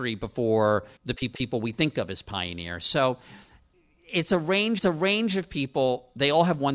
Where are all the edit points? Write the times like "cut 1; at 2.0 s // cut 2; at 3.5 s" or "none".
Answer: cut 1; at 1.0 s // cut 2; at 1.3 s // cut 3; at 4.8 s